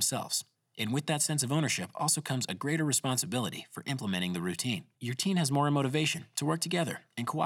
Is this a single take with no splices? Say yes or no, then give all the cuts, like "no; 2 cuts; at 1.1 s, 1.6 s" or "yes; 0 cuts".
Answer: no; 1 cut; at 4.9 s